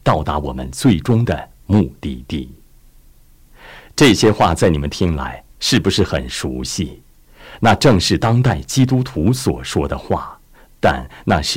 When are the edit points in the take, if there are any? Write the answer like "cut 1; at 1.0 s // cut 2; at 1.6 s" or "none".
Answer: none